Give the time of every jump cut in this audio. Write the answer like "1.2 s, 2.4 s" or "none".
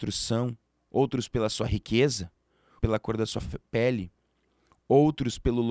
2.8 s